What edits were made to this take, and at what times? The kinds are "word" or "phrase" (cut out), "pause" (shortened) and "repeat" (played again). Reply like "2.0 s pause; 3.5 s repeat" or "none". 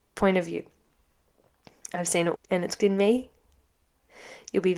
2.3 s word; 2.8 s word